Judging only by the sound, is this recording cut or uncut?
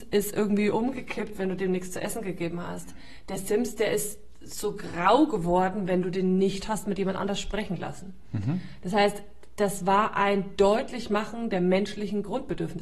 uncut